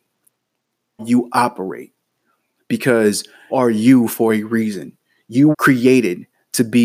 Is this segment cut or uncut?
cut